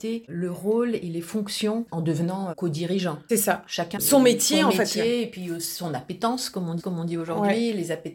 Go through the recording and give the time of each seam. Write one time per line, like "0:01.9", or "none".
0:04.0
0:06.8